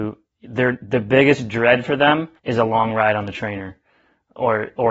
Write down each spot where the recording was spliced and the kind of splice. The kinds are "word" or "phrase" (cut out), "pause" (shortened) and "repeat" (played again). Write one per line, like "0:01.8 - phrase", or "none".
0:02.4 - pause